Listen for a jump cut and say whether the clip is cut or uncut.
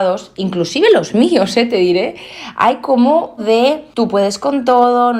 cut